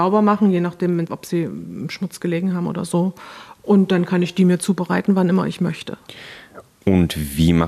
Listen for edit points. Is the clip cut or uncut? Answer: cut